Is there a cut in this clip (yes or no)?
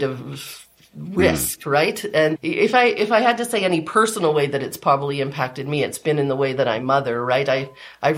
no